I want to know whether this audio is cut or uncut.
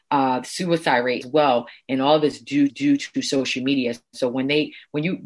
cut